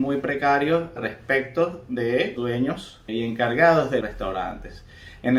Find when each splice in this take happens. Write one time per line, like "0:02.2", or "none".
0:01.0
0:02.4
0:03.1
0:04.0